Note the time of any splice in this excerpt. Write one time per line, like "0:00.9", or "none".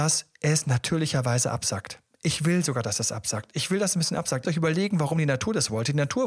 0:04.4